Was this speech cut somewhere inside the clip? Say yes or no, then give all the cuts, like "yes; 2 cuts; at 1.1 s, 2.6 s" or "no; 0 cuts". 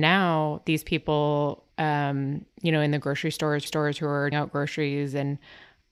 yes; 3 cuts; at 1.7 s, 3.7 s, 4.3 s